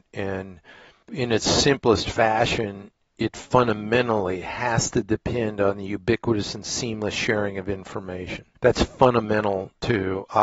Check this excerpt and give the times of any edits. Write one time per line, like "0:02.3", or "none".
0:08.6